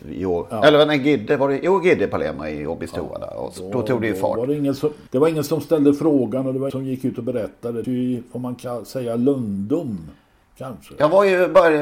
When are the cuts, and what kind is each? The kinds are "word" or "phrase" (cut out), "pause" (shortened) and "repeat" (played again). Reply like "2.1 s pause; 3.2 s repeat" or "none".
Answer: 5.1 s pause; 6.7 s word; 7.8 s word